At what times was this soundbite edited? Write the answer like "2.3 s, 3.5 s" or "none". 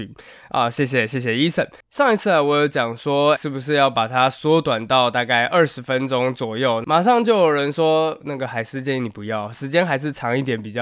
3.4 s